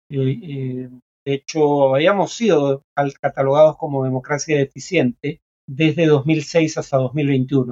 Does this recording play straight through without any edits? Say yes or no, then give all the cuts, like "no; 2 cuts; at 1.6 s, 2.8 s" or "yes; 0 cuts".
no; 1 cut; at 5.6 s